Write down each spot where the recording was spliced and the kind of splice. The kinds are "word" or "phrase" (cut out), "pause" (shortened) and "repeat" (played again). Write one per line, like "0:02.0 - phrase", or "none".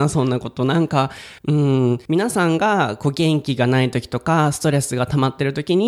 0:01.4 - pause
0:02.0 - pause